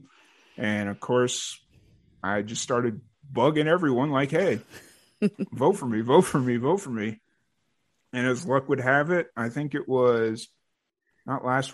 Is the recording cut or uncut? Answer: uncut